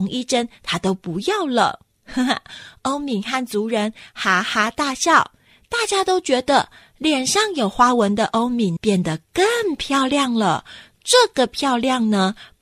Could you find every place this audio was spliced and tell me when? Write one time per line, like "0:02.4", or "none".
0:08.8